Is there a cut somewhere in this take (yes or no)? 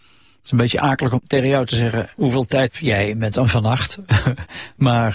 yes